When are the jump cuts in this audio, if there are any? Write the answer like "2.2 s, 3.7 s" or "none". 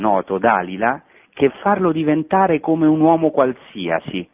1.5 s